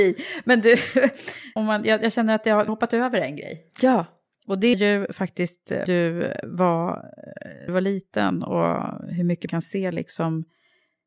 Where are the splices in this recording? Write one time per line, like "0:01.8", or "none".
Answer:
0:01.6
0:02.7
0:04.7
0:05.9
0:07.7
0:09.5